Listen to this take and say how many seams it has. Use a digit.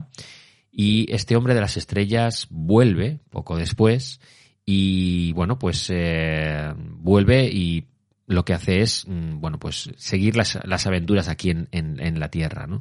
0